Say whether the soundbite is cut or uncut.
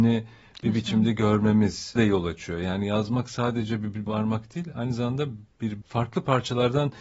cut